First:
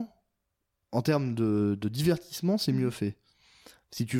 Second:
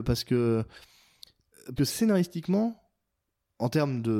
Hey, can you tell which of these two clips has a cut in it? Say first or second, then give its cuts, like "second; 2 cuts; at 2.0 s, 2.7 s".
second; 1 cut; at 1.8 s